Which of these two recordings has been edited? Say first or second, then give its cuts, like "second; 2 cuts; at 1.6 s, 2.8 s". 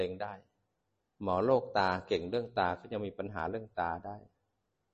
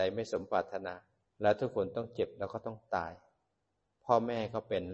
second; 1 cut; at 1.2 s